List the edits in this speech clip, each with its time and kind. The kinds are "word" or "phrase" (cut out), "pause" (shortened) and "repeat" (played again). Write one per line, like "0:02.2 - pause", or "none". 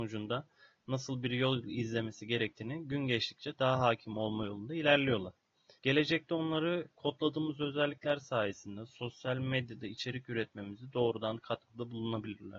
0:05.8 - pause